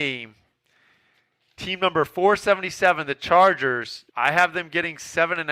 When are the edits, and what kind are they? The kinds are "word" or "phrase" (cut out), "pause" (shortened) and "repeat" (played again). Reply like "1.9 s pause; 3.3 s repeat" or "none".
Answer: 4.1 s pause